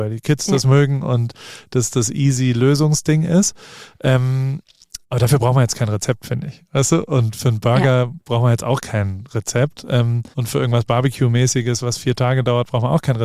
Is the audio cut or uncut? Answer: cut